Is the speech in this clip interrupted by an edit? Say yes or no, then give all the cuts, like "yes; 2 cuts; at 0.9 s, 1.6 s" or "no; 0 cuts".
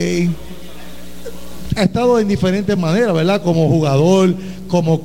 no; 0 cuts